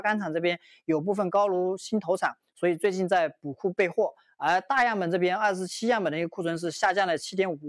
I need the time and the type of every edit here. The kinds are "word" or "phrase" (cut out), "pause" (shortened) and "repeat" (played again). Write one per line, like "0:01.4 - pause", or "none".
none